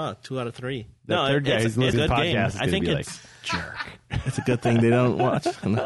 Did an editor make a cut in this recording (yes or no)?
yes